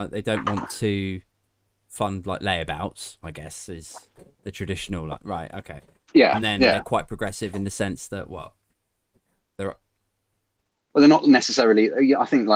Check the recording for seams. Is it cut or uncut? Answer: uncut